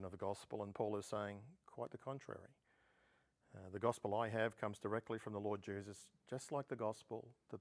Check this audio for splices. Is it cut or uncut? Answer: uncut